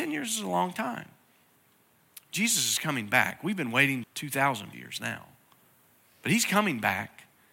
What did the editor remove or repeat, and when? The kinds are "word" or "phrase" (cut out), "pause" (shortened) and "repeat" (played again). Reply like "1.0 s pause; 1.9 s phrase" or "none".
1.5 s pause; 4.0 s word; 4.7 s word